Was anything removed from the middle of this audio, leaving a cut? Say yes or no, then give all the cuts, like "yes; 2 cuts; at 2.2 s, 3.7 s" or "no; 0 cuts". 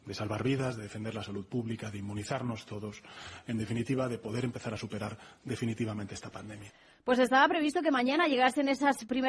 no; 0 cuts